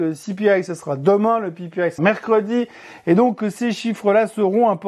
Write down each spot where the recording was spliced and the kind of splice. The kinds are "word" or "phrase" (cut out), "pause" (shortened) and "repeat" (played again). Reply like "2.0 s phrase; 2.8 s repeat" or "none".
2.0 s word